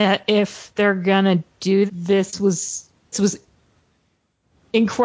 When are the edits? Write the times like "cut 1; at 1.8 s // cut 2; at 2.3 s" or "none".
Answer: cut 1; at 1.9 s // cut 2; at 3.1 s